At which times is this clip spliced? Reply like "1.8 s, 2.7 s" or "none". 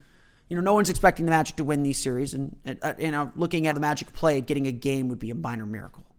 2.8 s, 3.7 s